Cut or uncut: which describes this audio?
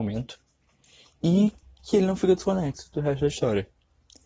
uncut